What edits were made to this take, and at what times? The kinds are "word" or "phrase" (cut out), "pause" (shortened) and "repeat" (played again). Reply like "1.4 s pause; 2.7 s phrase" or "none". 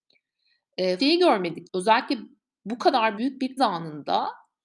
1.0 s word; 1.7 s word; 3.2 s word; 3.6 s word